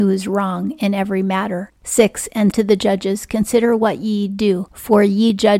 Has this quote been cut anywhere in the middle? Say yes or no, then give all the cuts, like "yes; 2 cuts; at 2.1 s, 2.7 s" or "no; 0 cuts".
yes; 2 cuts; at 1.8 s, 2.5 s